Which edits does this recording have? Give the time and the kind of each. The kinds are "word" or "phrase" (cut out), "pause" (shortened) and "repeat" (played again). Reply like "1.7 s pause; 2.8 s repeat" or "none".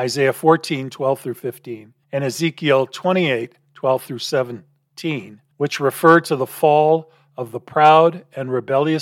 2.0 s pause; 5.5 s pause